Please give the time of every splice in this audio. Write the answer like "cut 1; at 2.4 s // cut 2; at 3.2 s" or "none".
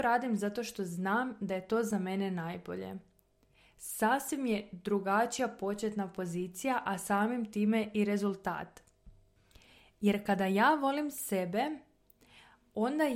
none